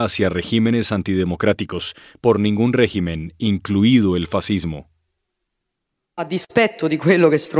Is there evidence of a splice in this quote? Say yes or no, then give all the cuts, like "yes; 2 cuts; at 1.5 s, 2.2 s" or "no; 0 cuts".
no; 0 cuts